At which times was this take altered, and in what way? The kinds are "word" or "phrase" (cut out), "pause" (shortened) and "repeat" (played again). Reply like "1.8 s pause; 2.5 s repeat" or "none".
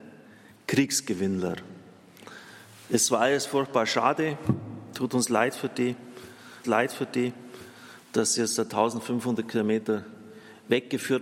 6.6 s repeat